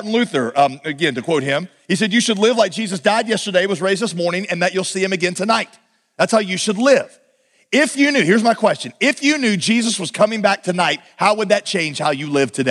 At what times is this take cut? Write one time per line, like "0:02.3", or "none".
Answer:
none